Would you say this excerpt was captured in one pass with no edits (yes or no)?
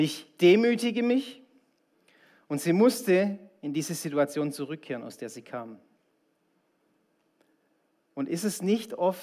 yes